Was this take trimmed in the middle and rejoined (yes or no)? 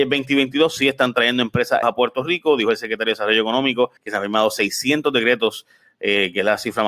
yes